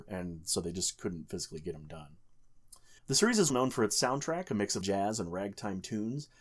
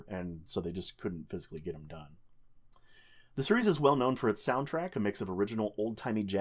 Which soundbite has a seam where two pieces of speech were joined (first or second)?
first